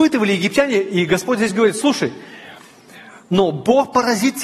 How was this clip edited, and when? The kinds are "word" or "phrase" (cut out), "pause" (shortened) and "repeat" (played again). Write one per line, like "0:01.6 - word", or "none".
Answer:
none

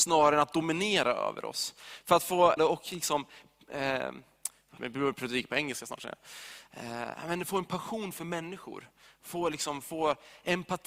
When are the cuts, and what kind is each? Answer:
0:02.6 - word
0:04.8 - phrase

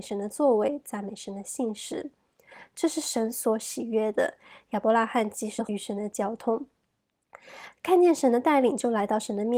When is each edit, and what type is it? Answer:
none

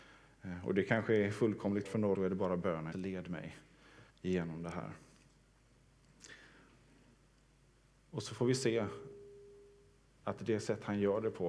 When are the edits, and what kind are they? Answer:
0:01.8 - word
0:02.1 - phrase
0:02.9 - word
0:04.1 - pause

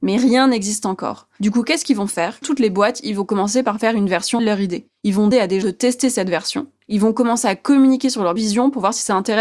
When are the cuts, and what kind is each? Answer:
0:02.4 - word
0:04.4 - word
0:05.3 - word
0:05.6 - word
0:08.4 - word

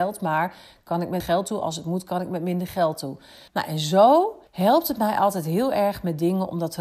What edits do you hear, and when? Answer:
0:01.2 - word
0:03.5 - pause
0:04.5 - pause

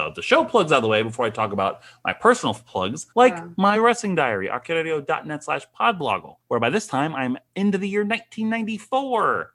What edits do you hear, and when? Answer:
0:03.1 - pause
0:03.8 - word
0:06.4 - pause

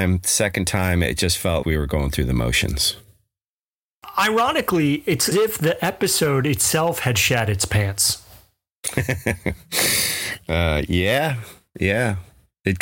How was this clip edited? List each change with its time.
0:01.6 - word
0:05.3 - word

